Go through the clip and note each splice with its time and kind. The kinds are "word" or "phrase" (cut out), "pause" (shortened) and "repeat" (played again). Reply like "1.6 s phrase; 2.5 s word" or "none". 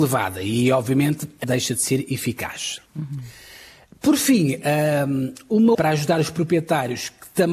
1.4 s word; 2.9 s pause; 5.7 s phrase